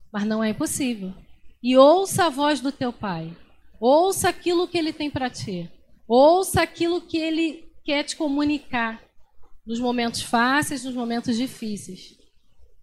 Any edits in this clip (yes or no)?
no